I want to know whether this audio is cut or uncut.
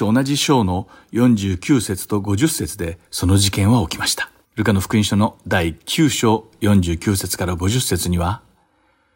cut